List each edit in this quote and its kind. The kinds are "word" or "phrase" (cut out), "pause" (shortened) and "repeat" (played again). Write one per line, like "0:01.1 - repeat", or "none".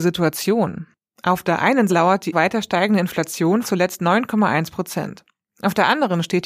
0:01.9 - word
0:02.3 - word
0:03.6 - word